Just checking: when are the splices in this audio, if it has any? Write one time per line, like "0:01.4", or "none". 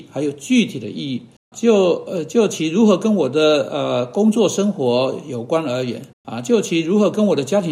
0:01.5
0:06.1

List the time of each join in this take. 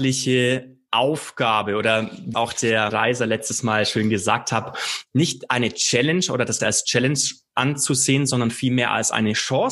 0:02.3
0:02.9
0:06.6

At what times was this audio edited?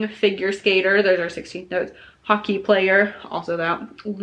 none

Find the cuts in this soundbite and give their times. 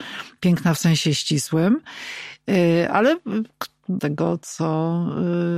0:04.0

